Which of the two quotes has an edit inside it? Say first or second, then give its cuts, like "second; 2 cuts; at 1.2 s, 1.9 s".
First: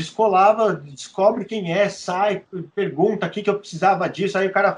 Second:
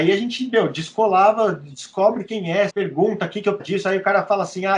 second; 2 cuts; at 2.7 s, 3.6 s